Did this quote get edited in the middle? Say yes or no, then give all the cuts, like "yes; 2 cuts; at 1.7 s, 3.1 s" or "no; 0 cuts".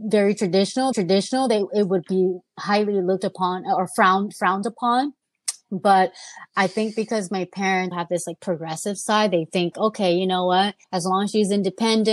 yes; 4 cuts; at 0.9 s, 7.9 s, 9.7 s, 10.8 s